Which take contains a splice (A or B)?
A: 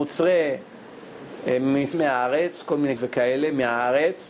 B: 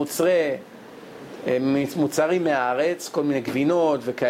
A